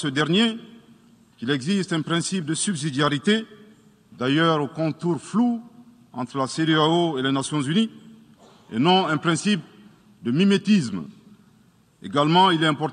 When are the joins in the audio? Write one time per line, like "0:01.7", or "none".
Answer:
none